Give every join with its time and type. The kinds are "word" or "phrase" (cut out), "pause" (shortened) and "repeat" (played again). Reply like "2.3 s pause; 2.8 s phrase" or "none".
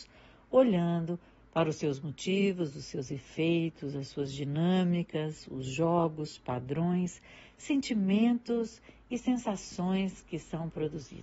none